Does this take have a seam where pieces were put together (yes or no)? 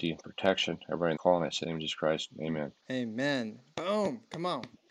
yes